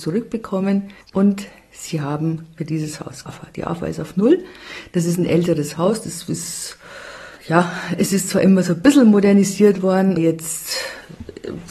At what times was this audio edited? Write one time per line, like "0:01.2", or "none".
0:01.0
0:02.6
0:03.3
0:07.4
0:10.2